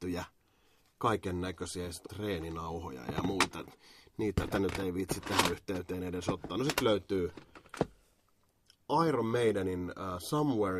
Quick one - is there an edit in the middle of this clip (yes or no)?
yes